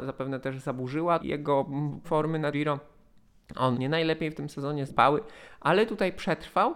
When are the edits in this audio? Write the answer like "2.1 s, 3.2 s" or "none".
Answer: 1.2 s, 2.0 s, 2.5 s, 3.7 s, 4.9 s